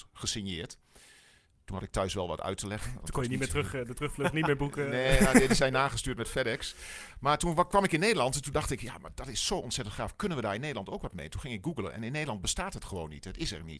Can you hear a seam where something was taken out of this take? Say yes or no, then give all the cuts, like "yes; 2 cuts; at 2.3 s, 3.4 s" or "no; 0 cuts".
no; 0 cuts